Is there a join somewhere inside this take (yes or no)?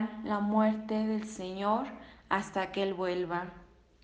no